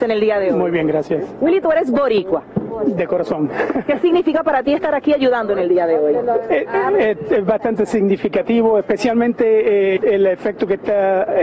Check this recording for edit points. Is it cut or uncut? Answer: cut